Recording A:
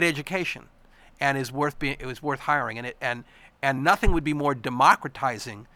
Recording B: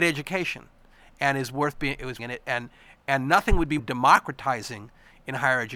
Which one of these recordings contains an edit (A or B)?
B